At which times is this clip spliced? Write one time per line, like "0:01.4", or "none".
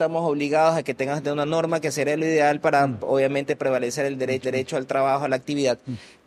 0:04.4